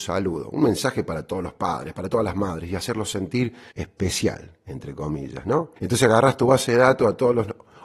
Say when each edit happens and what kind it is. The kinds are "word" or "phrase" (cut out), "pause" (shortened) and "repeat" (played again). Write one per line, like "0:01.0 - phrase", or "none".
0:03.7 - pause
0:05.8 - pause